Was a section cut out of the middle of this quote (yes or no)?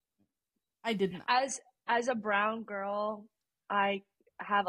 no